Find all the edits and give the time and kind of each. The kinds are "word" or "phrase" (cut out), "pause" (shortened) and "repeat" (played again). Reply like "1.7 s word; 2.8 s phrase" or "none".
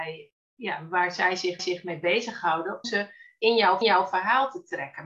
1.6 s repeat; 2.8 s word; 3.8 s repeat